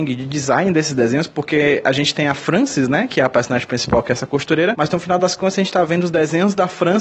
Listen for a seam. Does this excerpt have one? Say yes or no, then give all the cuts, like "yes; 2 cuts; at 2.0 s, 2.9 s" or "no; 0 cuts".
no; 0 cuts